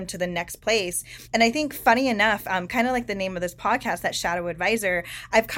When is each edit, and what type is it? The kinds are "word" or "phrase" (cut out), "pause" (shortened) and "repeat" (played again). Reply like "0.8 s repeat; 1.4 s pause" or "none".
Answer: 1.2 s pause